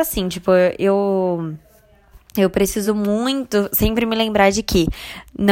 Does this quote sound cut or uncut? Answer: uncut